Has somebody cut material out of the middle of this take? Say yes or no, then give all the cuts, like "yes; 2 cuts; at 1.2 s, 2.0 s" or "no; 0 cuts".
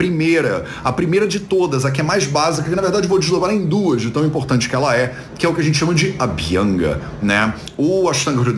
no; 0 cuts